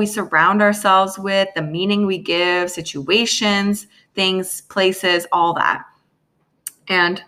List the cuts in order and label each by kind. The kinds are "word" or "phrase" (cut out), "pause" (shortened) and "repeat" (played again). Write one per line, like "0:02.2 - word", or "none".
none